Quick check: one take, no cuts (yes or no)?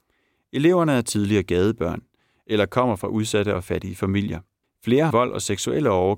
no